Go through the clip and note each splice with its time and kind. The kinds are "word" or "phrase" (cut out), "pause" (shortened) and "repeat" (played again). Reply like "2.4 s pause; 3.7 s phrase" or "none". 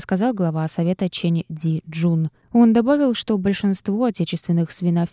none